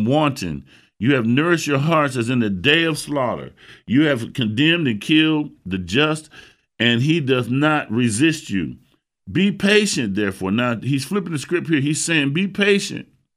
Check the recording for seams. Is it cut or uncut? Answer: uncut